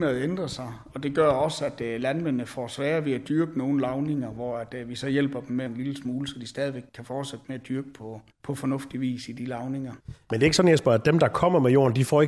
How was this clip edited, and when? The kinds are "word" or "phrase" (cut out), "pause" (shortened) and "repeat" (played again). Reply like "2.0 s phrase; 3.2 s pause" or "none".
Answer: 5.7 s phrase; 6.9 s word; 8.3 s pause; 10.0 s pause